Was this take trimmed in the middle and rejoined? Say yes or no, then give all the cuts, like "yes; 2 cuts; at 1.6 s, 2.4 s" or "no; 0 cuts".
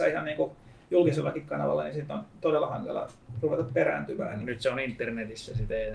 no; 0 cuts